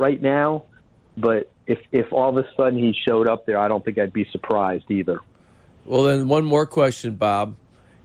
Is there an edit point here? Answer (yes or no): no